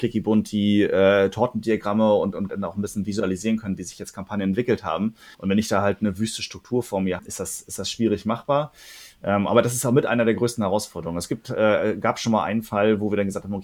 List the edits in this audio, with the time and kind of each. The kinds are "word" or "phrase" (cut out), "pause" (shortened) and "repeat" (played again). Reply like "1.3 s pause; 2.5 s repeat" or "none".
2.5 s phrase; 5.3 s pause; 7.2 s phrase

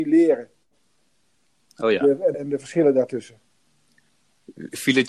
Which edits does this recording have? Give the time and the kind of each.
2.3 s word

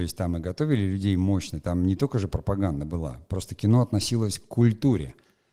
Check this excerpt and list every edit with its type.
none

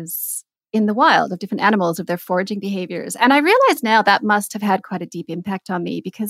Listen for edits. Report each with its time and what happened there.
none

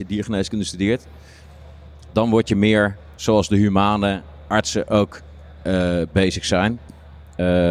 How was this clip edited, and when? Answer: 3.1 s pause

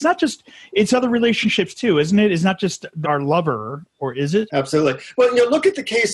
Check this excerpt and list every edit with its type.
3.0 s word; 4.5 s word

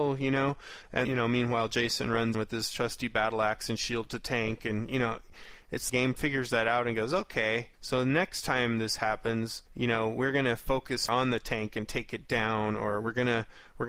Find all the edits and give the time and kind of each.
1.0 s word; 2.3 s word; 5.9 s phrase; 7.7 s pause; 9.7 s pause; 11.1 s word

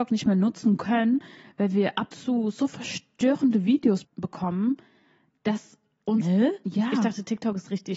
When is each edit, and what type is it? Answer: 2.1 s word; 4.0 s word

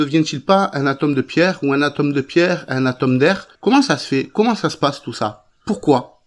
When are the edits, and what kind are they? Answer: 3.6 s pause

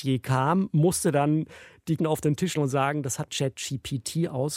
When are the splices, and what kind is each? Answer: 2.0 s word; 2.6 s word; 3.3 s word

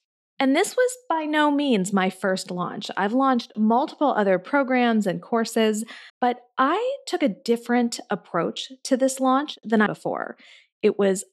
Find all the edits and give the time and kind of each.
6.1 s pause; 9.9 s phrase

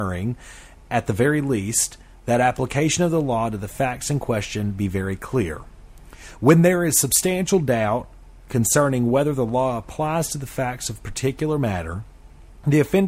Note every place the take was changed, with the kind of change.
none

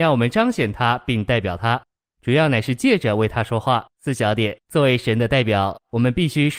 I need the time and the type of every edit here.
3.9 s pause; 4.6 s pause

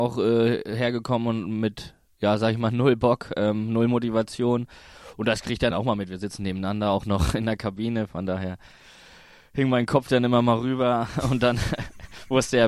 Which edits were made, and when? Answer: 5.7 s phrase

